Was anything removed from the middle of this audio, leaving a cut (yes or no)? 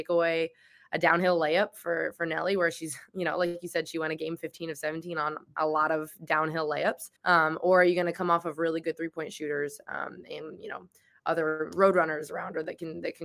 yes